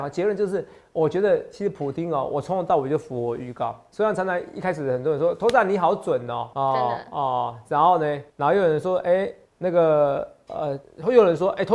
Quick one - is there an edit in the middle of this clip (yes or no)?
yes